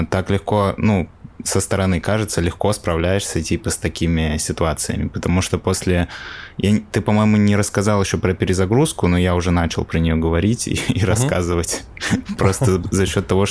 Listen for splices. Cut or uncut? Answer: uncut